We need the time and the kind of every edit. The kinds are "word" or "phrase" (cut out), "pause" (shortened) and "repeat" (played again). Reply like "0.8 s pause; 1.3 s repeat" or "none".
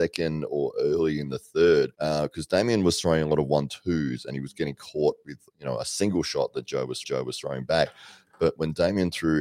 1.9 s pause; 7.0 s repeat